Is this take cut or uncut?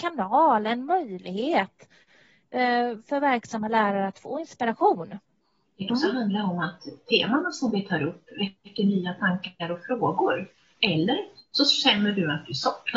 cut